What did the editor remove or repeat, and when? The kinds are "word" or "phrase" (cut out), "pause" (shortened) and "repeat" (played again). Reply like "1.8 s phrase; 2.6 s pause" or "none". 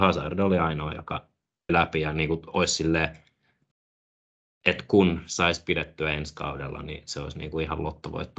1.7 s word